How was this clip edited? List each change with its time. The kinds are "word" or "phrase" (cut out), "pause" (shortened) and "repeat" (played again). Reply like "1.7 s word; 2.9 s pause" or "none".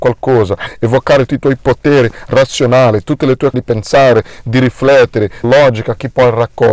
1.3 s word; 3.5 s word; 5.4 s phrase